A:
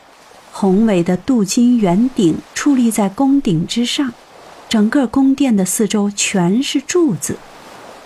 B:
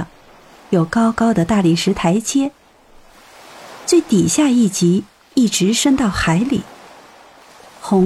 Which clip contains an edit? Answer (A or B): A